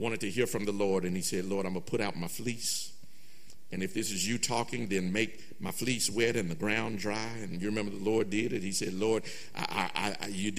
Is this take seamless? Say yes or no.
yes